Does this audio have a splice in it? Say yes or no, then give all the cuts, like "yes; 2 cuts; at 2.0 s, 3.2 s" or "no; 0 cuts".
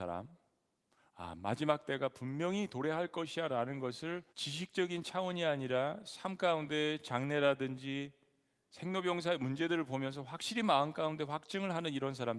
yes; 1 cut; at 4.3 s